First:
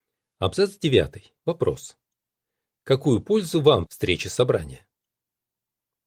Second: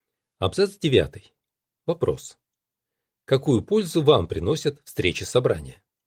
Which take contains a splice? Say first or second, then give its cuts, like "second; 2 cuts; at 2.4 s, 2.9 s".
first; 2 cuts; at 1.4 s, 3.9 s